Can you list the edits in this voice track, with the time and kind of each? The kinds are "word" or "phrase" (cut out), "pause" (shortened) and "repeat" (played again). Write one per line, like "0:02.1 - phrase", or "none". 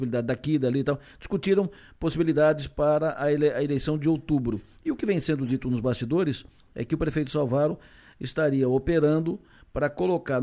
none